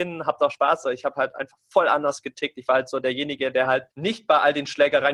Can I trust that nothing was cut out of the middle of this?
no; 1 cut; at 3.9 s

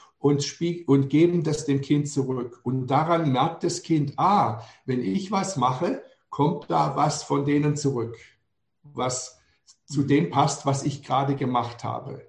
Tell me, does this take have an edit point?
no; 0 cuts

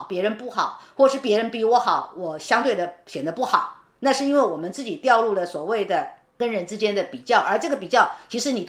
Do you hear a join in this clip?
no; 0 cuts

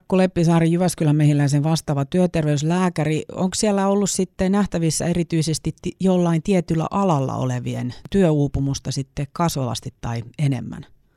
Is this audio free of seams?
yes; 0 cuts

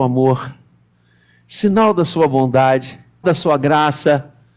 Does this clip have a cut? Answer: yes; 1 cut; at 3.2 s

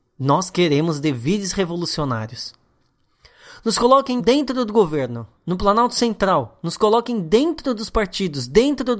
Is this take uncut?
no; 2 cuts; at 4.2 s, 5.4 s

